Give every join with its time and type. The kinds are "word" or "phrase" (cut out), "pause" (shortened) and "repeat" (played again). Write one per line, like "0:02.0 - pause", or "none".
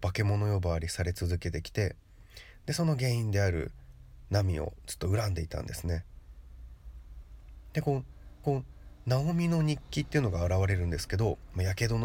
0:08.4 - repeat